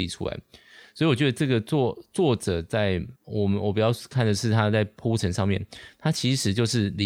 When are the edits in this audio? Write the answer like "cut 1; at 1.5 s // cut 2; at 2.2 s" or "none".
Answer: cut 1; at 3.2 s